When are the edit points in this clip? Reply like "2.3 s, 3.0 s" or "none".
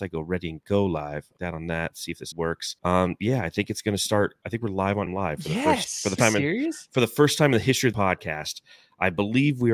1.4 s, 2.3 s, 2.8 s, 4.4 s, 5.1 s, 6.2 s, 7.9 s